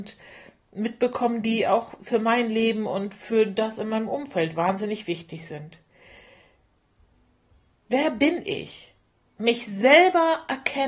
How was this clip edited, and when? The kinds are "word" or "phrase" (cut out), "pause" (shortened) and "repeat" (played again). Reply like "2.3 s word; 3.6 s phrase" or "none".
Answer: none

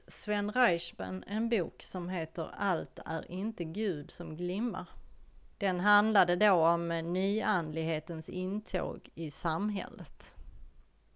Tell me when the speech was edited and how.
5.5 s pause

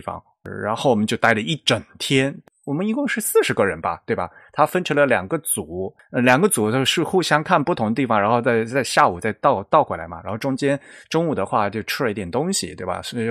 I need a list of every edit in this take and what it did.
none

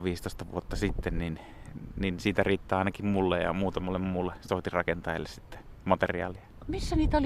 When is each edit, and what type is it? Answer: none

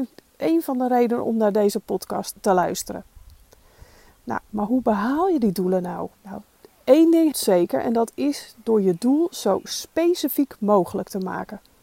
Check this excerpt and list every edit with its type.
2.3 s word; 6.2 s pause; 7.3 s word

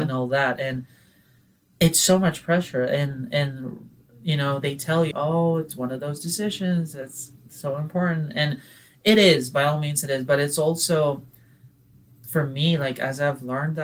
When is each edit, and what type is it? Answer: 5.1 s word

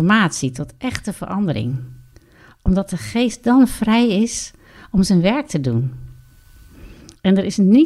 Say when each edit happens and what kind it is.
none

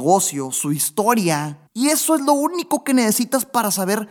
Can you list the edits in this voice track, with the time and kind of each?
1.7 s pause

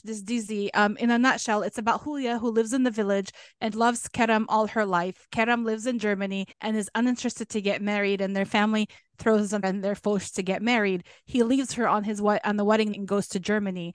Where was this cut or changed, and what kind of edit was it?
3.7 s word; 6.5 s pause; 9.6 s word; 12.9 s word

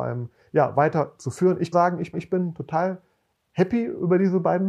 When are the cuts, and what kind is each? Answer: 1.7 s phrase; 2.1 s repeat

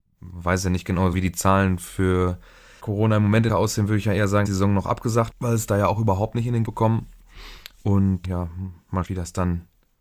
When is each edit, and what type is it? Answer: 1.1 s word; 2.8 s word; 3.5 s word; 4.5 s word; 5.3 s word; 6.6 s word; 8.2 s word; 9.0 s word

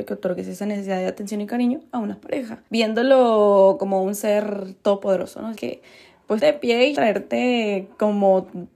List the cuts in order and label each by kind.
2.7 s pause; 5.5 s word; 6.4 s phrase; 6.9 s word

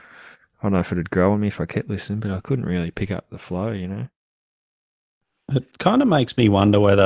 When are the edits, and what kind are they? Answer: none

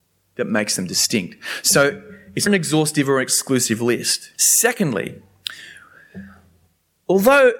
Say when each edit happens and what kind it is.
2.5 s word; 4.3 s pause

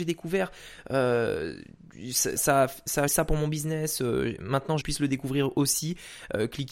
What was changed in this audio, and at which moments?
2.4 s word; 3.1 s word; 4.8 s phrase

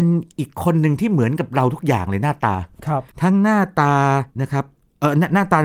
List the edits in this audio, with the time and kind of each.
3.1 s pause; 4.3 s pause

